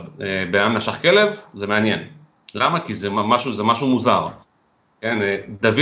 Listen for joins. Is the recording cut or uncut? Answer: uncut